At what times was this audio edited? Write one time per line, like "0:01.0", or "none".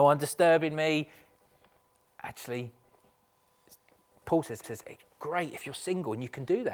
0:04.6